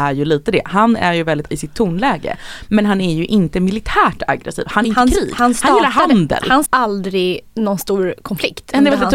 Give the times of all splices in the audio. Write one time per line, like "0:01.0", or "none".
0:01.5
0:04.8
0:06.7

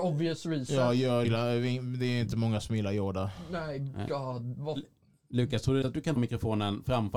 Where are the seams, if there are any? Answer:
0:01.2
0:05.8
0:06.2

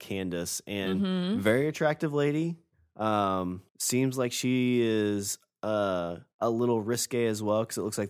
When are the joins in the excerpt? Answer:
0:03.7
0:06.3

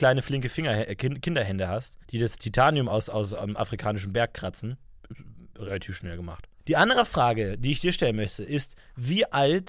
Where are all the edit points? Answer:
0:02.0
0:06.6

